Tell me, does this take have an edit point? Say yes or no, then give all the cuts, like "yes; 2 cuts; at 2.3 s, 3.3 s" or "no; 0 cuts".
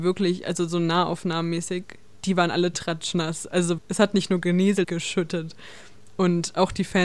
yes; 2 cuts; at 3.8 s, 4.8 s